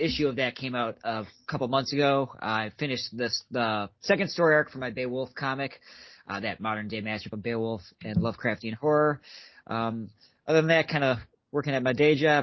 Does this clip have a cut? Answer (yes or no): no